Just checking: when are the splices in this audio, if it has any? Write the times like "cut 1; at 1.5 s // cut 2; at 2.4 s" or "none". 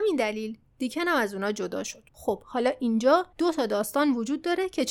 cut 1; at 2.1 s // cut 2; at 3.3 s